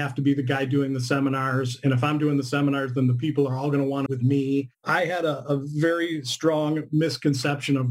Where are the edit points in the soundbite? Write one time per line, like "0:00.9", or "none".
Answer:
0:04.1
0:04.7